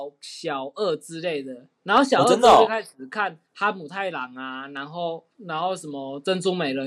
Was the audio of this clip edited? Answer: yes; 2 cuts; at 3.5 s, 5.3 s

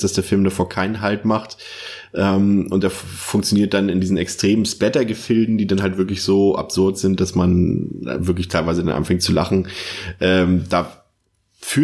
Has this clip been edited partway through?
no; 0 cuts

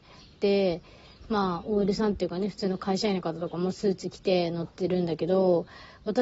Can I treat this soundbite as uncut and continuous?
yes; 0 cuts

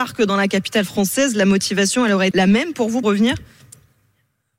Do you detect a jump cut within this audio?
yes; 2 cuts; at 2.3 s, 3.0 s

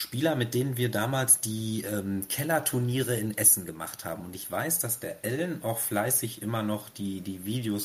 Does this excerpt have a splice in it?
no; 0 cuts

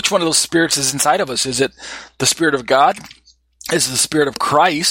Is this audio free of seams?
yes; 0 cuts

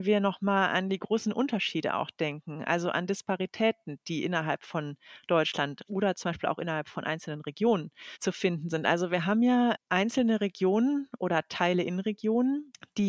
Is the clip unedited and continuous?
yes; 0 cuts

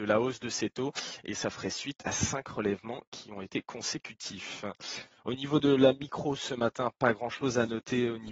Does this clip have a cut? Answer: no; 0 cuts

